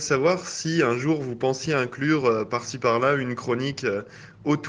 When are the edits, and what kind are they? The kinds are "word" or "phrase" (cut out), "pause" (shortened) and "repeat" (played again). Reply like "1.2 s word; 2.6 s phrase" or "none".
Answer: none